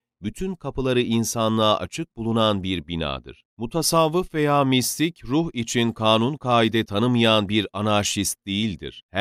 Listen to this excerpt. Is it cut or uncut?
uncut